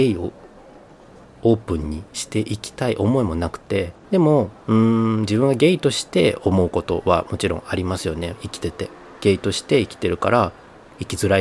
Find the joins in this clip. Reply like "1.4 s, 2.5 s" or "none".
4.0 s, 4.6 s